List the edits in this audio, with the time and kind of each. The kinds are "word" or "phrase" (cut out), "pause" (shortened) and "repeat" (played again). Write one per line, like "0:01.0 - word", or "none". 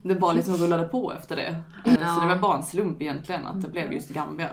0:02.0 - word